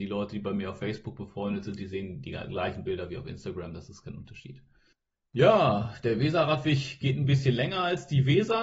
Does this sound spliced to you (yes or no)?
yes